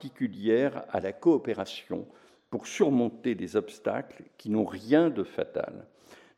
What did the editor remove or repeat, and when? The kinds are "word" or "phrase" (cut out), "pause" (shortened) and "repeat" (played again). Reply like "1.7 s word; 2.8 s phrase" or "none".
none